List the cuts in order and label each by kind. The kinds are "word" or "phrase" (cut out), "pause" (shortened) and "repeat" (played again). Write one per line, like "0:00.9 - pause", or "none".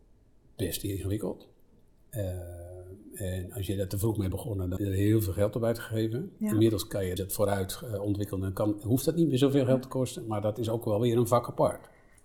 0:04.3 - word
0:04.8 - word
0:07.2 - phrase